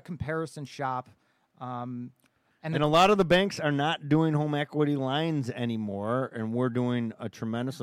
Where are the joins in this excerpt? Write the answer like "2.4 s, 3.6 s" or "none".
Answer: none